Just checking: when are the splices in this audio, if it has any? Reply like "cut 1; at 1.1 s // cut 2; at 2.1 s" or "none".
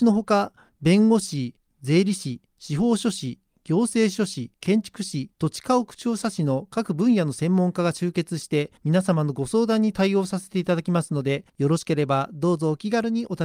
cut 1; at 4.5 s // cut 2; at 5.3 s // cut 3; at 8.8 s // cut 4; at 11.5 s